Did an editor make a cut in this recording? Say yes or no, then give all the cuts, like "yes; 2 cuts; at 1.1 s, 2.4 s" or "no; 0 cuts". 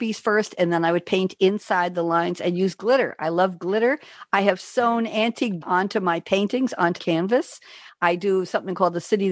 yes; 2 cuts; at 5.6 s, 7.0 s